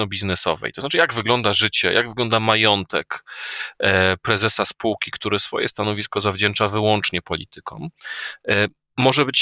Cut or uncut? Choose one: uncut